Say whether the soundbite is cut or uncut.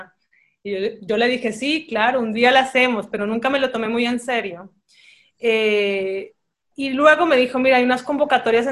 uncut